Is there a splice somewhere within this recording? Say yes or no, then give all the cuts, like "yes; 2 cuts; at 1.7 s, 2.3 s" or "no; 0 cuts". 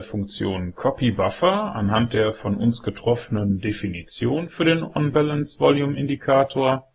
no; 0 cuts